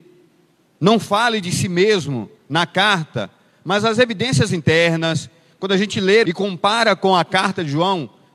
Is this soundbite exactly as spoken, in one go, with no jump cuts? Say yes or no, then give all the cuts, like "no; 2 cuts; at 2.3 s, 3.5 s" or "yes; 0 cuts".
no; 2 cuts; at 2.4 s, 6.2 s